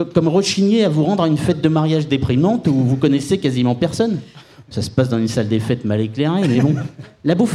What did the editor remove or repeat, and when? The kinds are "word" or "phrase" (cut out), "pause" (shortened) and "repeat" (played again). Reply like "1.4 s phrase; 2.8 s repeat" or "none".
none